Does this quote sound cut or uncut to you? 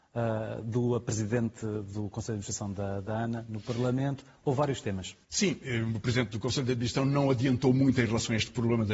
cut